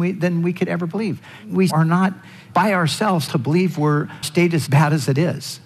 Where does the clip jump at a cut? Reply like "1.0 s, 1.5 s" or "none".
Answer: 1.7 s, 3.3 s, 4.2 s, 4.7 s